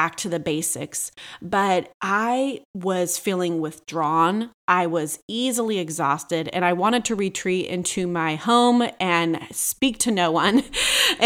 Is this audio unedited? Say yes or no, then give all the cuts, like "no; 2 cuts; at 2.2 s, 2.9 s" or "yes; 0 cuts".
yes; 0 cuts